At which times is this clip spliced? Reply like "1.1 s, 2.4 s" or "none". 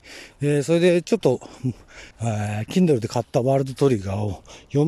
2.1 s